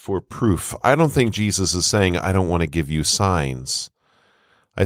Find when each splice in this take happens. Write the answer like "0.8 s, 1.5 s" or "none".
none